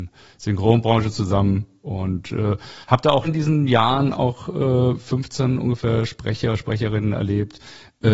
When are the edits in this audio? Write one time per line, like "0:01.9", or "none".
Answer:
0:03.2